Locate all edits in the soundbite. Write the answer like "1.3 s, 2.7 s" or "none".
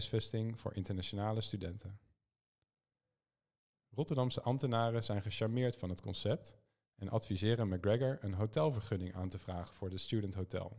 none